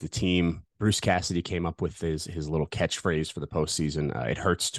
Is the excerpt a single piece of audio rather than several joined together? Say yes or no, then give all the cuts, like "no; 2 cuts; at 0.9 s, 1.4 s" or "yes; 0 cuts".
yes; 0 cuts